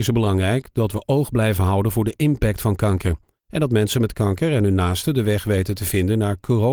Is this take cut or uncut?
uncut